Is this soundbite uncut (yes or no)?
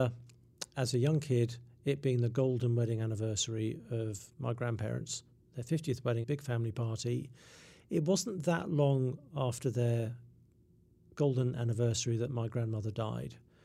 no